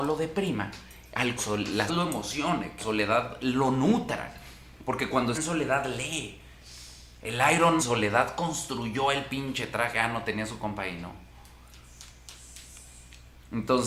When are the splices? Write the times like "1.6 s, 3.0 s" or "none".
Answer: 1.4 s, 1.9 s, 2.8 s, 5.3 s, 7.8 s